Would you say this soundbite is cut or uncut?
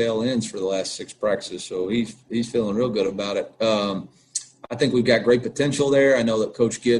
uncut